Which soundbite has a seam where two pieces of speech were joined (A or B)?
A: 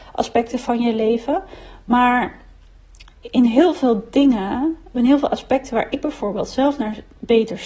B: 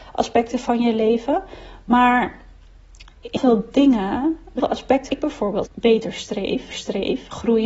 B